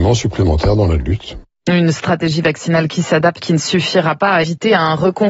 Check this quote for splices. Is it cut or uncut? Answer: cut